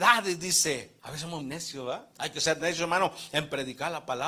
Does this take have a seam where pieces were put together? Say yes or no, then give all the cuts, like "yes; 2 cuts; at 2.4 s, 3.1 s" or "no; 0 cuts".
yes; 3 cuts; at 1.0 s, 1.4 s, 2.1 s